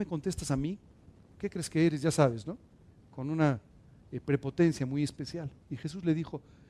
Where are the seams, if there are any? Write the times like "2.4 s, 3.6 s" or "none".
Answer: none